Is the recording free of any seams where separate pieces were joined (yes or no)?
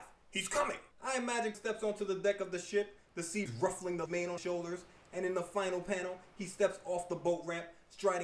no